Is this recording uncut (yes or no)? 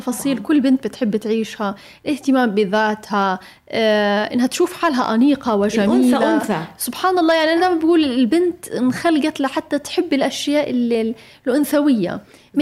yes